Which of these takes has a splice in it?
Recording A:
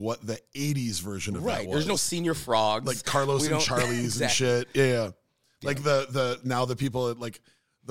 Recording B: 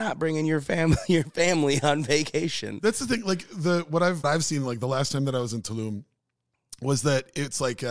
B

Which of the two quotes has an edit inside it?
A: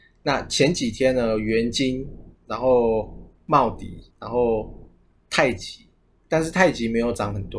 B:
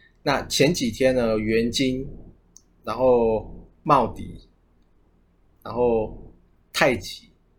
A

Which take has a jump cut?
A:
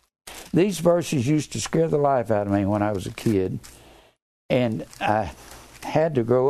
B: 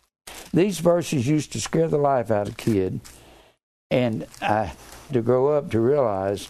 B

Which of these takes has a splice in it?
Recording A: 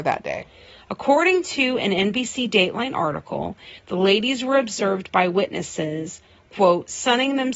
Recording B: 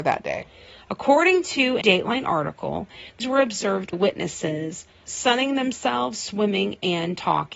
B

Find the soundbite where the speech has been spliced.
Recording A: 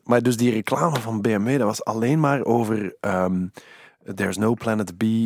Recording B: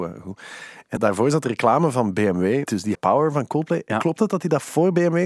B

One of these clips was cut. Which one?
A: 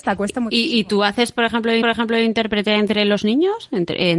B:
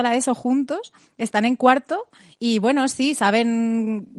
A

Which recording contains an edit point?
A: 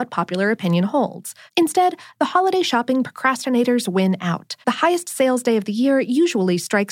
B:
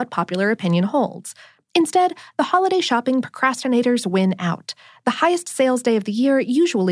A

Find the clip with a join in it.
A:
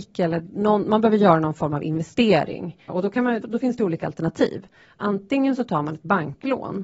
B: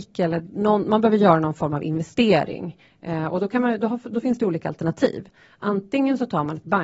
A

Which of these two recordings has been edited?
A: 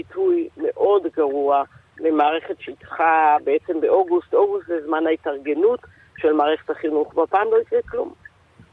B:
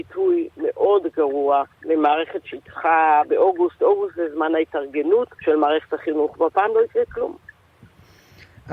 B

